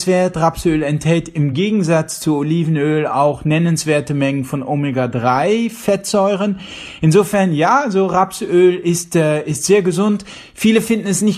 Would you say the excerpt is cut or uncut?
uncut